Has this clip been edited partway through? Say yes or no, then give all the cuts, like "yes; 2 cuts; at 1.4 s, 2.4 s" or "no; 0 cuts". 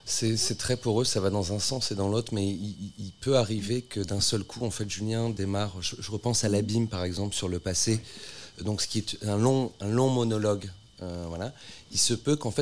no; 0 cuts